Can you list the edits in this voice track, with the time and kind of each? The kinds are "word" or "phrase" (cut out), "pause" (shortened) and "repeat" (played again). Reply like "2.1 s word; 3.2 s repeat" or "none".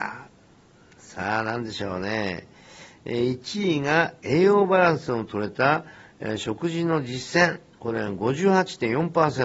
7.7 s pause